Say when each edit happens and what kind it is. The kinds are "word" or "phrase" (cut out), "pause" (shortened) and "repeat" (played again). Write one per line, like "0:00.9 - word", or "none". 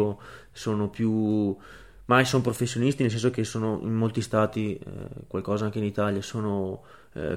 none